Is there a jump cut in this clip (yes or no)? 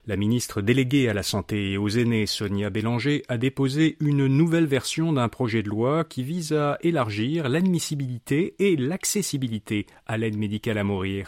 no